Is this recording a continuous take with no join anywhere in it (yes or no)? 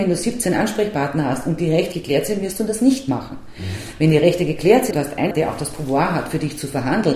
no